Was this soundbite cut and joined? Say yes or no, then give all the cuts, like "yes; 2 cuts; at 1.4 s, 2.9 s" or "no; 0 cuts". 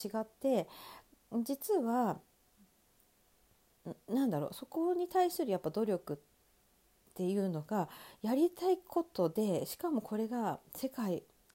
no; 0 cuts